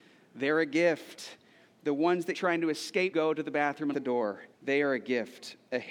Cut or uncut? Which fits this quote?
cut